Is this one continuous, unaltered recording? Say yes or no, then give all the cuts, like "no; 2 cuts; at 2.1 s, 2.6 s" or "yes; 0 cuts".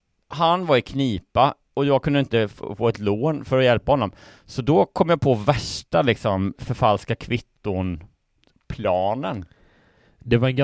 yes; 0 cuts